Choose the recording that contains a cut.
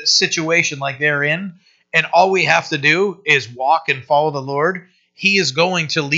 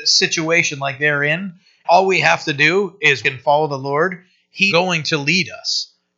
second; 3 cuts; at 1.8 s, 3.2 s, 4.7 s

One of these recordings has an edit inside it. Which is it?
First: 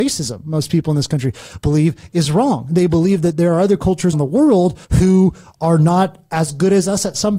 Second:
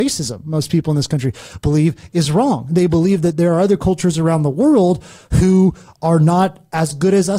first; 2 cuts; at 4.1 s, 4.8 s

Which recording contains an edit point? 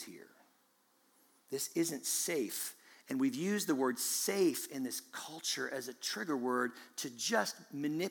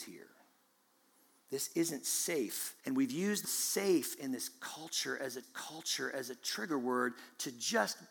second; 3 cuts; at 2.8 s, 3.4 s, 5.4 s

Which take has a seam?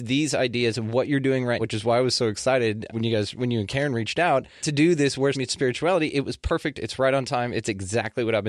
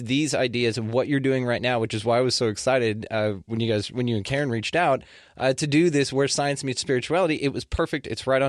first; 4 cuts; at 1.6 s, 2.9 s, 4.6 s, 5.3 s

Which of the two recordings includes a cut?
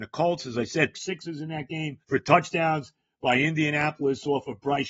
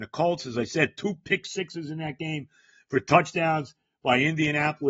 first; 2 cuts; at 0.9 s, 2.0 s

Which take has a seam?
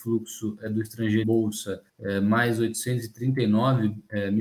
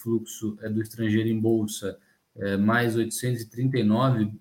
first; 2 cuts; at 1.2 s, 1.9 s

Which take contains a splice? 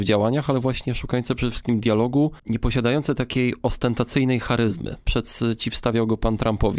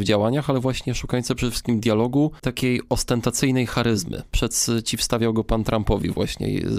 second; 1 cut; at 2.4 s

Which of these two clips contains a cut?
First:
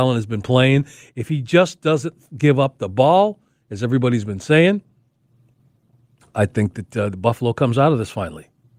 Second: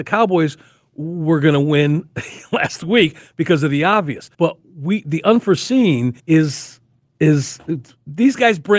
second; 2 cuts; at 4.3 s, 6.2 s

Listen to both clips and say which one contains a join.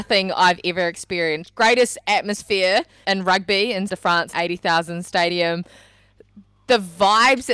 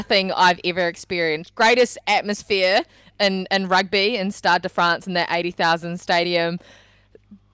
first; 3 cuts; at 3.0 s, 3.9 s, 4.3 s

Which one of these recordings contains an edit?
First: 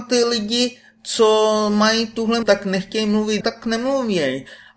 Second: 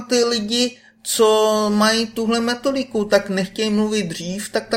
first; 2 cuts; at 2.4 s, 3.4 s

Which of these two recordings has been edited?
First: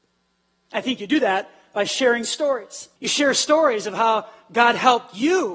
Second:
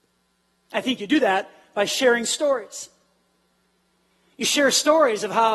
first; 1 cut; at 3.0 s

